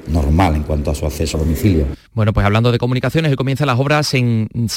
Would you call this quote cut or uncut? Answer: cut